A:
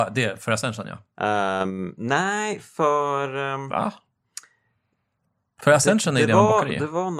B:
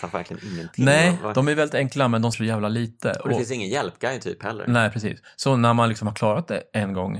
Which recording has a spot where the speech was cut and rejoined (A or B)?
B